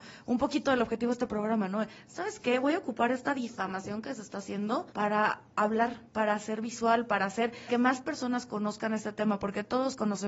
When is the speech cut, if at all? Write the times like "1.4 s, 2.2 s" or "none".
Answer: 4.9 s, 6.1 s, 7.7 s